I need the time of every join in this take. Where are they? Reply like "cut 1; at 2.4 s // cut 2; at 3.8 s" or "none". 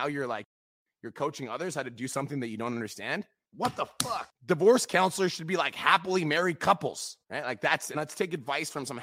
cut 1; at 7.2 s // cut 2; at 7.9 s